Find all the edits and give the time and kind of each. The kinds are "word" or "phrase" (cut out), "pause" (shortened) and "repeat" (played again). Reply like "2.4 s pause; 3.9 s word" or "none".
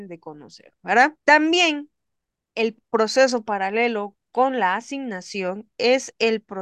1.2 s pause